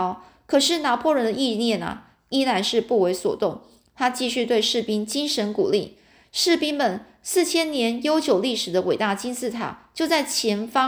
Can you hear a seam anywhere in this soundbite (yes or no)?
no